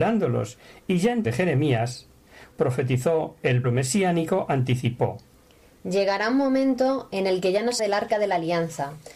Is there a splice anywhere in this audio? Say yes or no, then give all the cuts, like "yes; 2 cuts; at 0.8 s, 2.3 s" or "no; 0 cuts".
yes; 4 cuts; at 1.2 s, 2.5 s, 3.6 s, 7.8 s